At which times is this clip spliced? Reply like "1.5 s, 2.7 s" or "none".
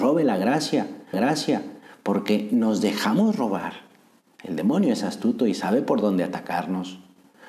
1.1 s, 4.2 s

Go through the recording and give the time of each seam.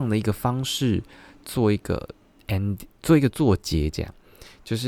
none

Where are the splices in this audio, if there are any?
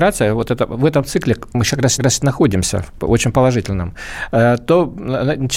2.0 s

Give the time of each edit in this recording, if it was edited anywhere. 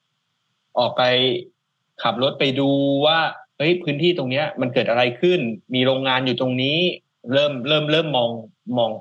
3.5 s

